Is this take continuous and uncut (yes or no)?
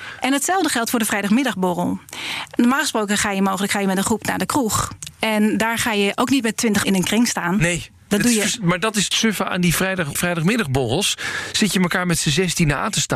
no